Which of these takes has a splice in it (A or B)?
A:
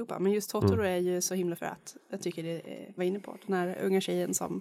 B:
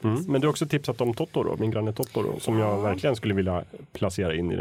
A